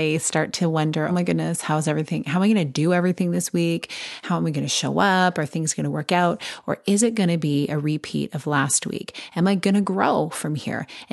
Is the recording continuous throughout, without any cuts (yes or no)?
no